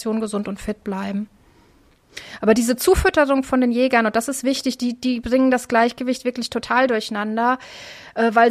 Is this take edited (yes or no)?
no